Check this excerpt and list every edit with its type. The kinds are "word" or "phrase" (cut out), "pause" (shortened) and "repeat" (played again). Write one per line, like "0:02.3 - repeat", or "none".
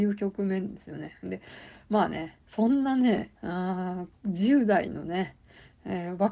0:02.4 - pause
0:03.3 - pause